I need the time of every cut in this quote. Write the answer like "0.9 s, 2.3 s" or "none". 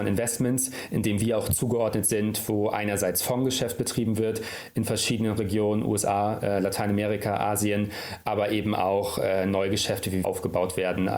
10.2 s